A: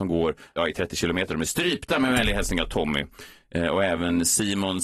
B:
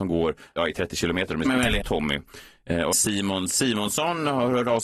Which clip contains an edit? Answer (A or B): B